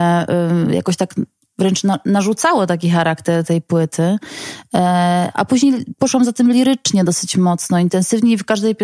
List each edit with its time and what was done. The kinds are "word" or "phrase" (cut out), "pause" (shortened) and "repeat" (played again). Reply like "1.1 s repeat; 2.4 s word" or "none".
none